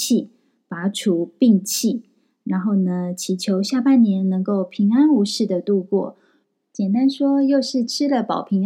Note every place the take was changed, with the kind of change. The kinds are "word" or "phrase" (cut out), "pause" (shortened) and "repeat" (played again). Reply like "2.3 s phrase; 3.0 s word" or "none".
none